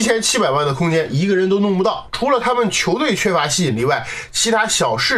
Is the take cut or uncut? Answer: uncut